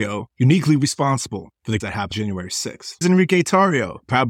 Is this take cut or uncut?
cut